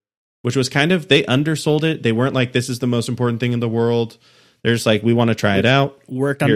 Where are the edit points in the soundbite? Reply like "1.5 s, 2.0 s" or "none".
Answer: none